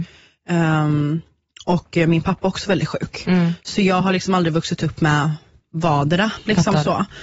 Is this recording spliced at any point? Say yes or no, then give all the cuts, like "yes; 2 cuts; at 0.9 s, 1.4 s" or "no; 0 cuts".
no; 0 cuts